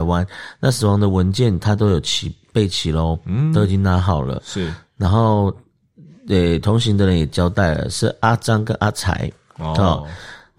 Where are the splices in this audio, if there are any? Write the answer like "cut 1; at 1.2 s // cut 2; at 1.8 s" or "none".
none